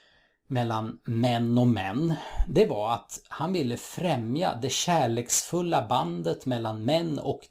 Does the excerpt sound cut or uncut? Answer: uncut